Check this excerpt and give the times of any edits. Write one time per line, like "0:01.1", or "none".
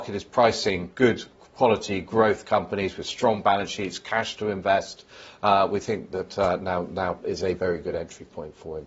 0:00.9
0:07.2